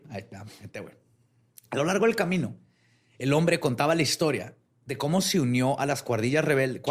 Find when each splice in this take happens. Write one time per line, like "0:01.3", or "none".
none